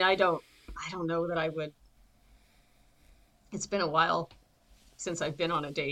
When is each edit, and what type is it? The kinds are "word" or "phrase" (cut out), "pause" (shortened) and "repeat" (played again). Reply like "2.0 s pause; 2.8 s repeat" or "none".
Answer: none